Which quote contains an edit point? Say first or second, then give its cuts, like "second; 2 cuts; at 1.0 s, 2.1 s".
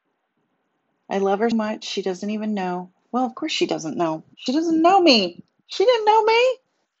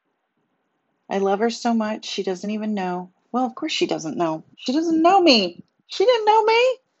first; 1 cut; at 1.5 s